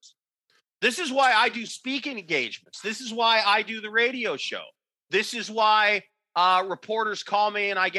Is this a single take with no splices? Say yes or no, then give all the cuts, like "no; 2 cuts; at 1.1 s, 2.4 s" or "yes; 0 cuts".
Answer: yes; 0 cuts